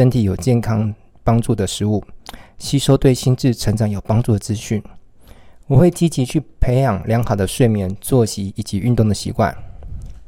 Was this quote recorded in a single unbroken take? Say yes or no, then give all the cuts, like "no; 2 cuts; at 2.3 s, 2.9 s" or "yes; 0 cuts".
yes; 0 cuts